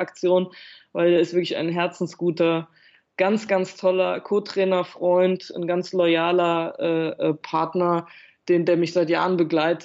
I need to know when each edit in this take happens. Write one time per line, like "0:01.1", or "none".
none